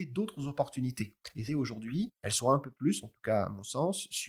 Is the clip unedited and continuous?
no; 1 cut; at 1.5 s

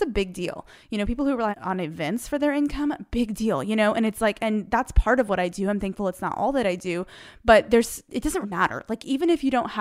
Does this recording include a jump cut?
yes; 2 cuts; at 1.5 s, 8.4 s

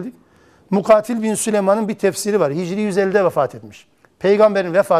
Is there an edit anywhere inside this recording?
yes; 1 cut; at 3.9 s

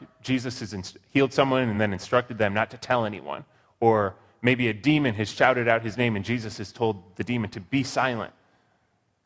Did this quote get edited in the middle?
no; 0 cuts

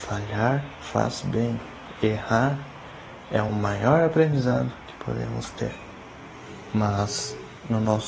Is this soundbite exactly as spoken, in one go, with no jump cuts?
yes; 0 cuts

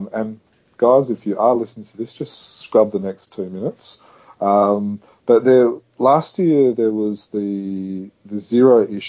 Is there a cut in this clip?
no; 0 cuts

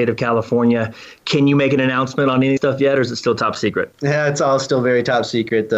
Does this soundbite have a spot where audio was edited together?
yes; 1 cut; at 2.6 s

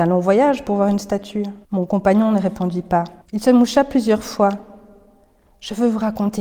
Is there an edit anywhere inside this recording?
yes; 2 cuts; at 1.6 s, 3.2 s

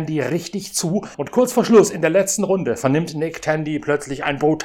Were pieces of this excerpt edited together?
no; 0 cuts

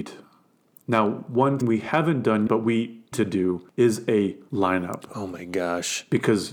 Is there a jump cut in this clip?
yes; 4 cuts; at 1.6 s, 2.5 s, 3.1 s, 4.5 s

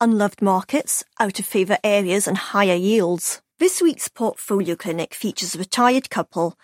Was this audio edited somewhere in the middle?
yes; 1 cut; at 3.5 s

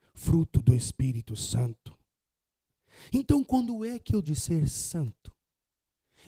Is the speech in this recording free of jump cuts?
no; 1 cut; at 4.2 s

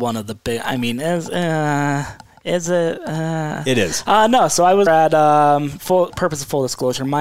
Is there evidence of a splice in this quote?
yes; 2 cuts; at 4.9 s, 6.1 s

